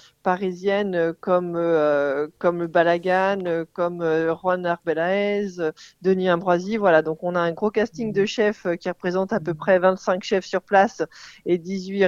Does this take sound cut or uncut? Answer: uncut